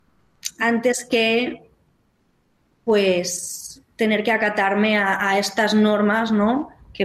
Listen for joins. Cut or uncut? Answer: uncut